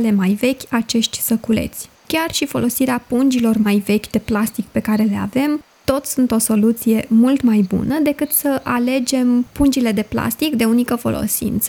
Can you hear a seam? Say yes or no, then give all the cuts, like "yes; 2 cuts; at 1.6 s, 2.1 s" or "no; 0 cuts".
yes; 1 cut; at 2.0 s